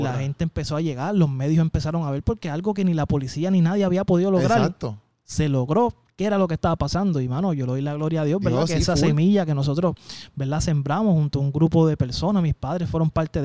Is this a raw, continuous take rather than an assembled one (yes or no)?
yes